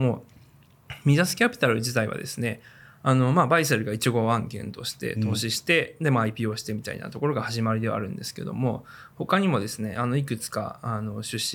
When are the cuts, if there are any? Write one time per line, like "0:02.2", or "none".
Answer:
none